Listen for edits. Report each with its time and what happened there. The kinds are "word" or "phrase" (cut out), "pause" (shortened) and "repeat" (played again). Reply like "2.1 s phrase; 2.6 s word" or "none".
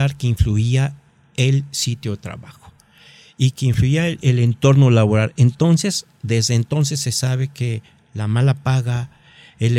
none